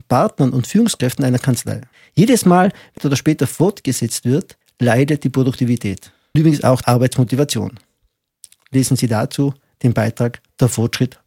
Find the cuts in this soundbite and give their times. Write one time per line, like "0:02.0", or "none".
0:01.9
0:03.0
0:04.6
0:06.4
0:06.8